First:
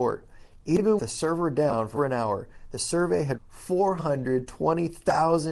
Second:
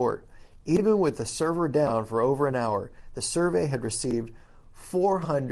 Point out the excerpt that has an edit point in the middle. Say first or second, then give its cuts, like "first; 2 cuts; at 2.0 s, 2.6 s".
first; 3 cuts; at 1.0 s, 2.0 s, 3.4 s